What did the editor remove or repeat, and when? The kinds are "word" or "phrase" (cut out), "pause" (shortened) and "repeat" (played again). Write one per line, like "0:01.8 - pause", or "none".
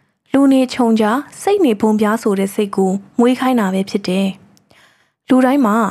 none